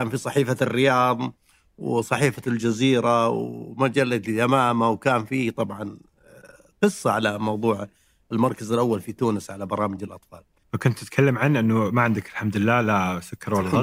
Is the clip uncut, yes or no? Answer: yes